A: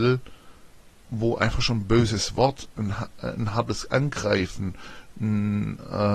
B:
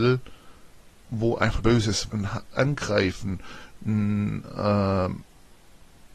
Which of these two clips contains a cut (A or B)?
B